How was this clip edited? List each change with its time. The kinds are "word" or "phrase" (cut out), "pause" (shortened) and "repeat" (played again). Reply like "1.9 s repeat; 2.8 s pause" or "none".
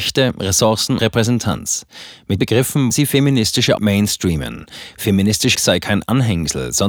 1.0 s word; 2.4 s word; 2.9 s word; 3.8 s word; 5.5 s word